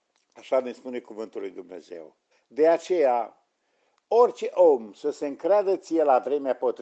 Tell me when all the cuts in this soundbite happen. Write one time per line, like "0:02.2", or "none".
0:02.3